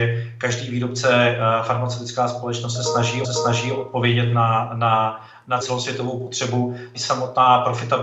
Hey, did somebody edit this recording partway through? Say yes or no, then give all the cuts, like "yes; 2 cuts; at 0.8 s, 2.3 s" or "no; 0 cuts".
yes; 3 cuts; at 3.2 s, 5.6 s, 6.9 s